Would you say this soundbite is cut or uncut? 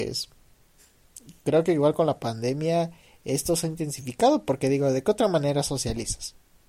uncut